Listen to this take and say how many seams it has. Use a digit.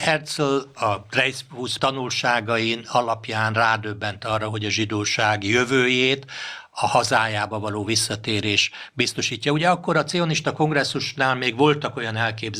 1